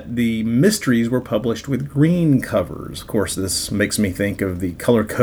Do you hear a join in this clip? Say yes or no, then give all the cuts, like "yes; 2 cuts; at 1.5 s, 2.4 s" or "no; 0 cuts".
no; 0 cuts